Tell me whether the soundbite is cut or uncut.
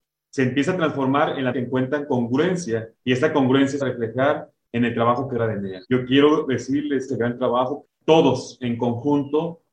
cut